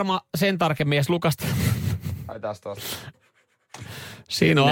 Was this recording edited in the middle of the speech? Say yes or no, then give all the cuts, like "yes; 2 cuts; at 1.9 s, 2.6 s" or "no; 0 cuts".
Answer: no; 0 cuts